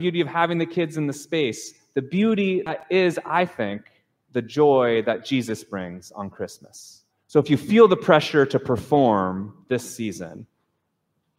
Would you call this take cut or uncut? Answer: cut